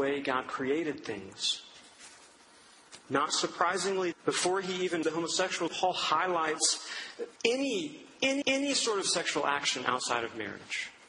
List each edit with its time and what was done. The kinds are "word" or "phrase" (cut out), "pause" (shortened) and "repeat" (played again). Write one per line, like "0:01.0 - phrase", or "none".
0:04.1 - word
0:05.0 - word
0:05.7 - phrase
0:07.4 - pause
0:08.4 - repeat